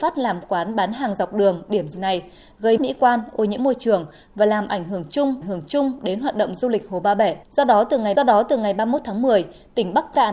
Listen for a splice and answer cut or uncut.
cut